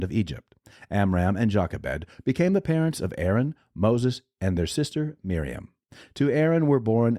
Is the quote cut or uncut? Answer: uncut